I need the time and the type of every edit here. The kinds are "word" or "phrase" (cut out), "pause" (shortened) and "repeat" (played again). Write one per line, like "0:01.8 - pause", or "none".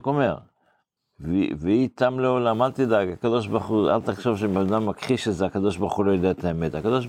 0:01.0 - pause